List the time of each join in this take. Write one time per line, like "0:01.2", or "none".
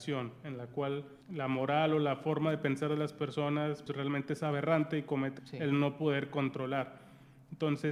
0:01.2
0:03.9
0:05.4